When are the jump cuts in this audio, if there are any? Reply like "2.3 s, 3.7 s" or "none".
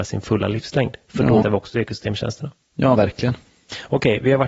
1.4 s, 3.0 s